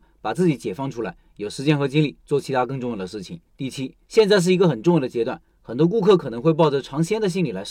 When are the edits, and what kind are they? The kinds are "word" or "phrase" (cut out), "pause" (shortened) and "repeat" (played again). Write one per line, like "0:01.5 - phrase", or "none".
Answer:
0:03.5 - pause
0:04.0 - pause